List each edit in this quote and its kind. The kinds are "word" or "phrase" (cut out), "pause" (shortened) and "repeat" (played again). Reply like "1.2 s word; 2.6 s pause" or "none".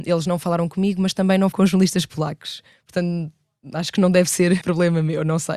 1.5 s word; 4.6 s word